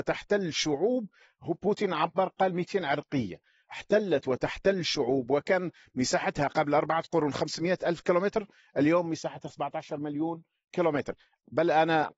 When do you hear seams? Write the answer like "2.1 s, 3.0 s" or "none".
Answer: none